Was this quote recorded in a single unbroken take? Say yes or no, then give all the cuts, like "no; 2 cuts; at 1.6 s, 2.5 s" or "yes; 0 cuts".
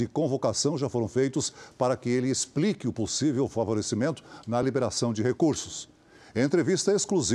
yes; 0 cuts